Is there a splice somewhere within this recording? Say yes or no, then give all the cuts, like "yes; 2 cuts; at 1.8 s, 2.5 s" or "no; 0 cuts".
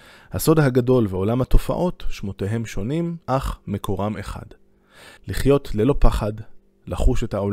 yes; 2 cuts; at 3.2 s, 5.2 s